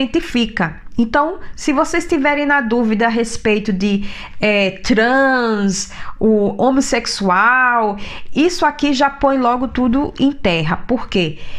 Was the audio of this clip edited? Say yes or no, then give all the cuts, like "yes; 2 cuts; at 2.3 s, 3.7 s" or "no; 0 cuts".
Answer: no; 0 cuts